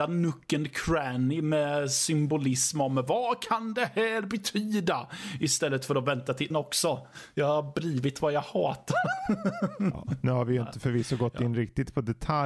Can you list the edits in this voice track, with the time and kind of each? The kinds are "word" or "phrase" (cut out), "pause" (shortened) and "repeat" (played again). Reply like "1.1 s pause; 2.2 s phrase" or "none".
6.5 s word